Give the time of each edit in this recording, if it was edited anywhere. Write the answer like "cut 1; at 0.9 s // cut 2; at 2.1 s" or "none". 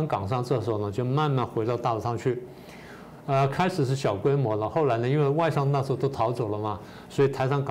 none